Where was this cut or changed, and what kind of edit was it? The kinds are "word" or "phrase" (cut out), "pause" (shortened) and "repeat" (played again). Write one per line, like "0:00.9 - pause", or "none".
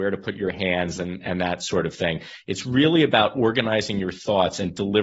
none